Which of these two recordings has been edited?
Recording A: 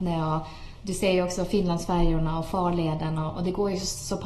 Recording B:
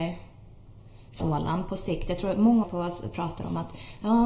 B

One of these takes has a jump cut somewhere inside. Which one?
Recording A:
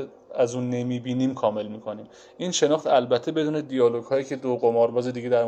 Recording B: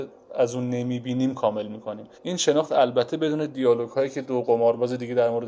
B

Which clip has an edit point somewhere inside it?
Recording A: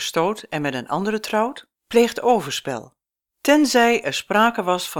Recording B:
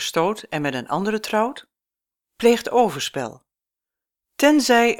A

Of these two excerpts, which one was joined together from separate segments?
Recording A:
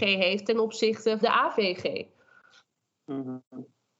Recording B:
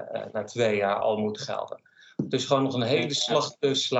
A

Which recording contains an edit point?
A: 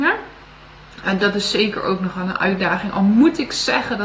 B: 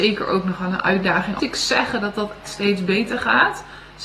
B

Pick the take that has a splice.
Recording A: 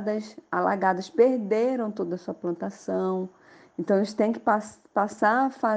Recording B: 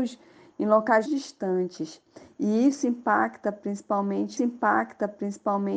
B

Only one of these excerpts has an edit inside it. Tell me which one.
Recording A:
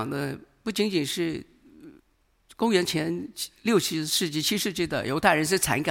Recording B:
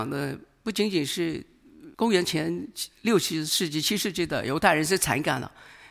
B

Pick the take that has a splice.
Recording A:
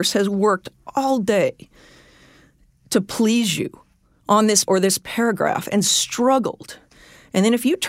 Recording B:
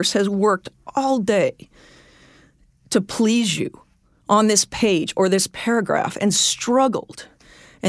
A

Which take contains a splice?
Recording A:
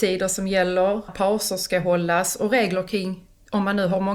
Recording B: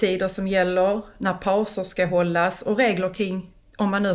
A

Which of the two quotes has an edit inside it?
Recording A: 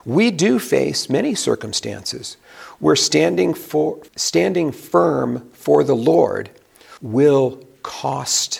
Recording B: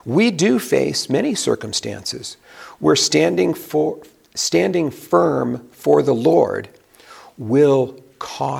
A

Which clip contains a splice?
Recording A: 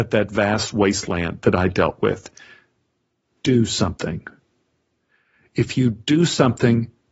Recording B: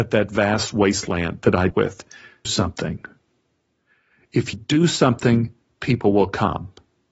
B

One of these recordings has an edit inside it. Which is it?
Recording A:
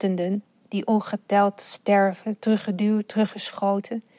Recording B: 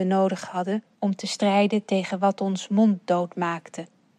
B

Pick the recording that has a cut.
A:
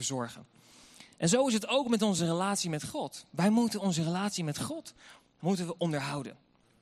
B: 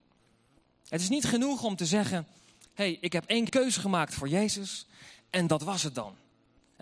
B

